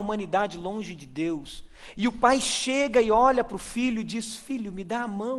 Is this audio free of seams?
yes; 0 cuts

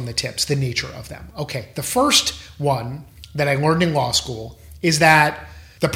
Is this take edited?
no; 0 cuts

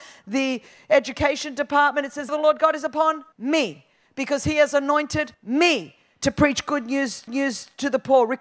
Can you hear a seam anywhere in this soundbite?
yes; 4 cuts; at 2.3 s, 3.3 s, 5.3 s, 7.3 s

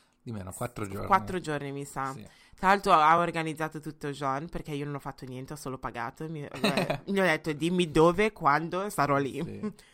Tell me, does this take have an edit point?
no; 0 cuts

